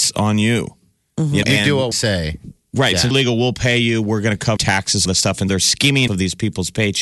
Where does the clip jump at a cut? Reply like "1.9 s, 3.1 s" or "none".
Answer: 1.4 s, 1.9 s, 3.1 s, 4.6 s, 5.1 s, 5.5 s, 6.1 s